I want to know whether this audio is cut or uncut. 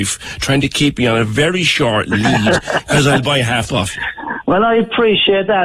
cut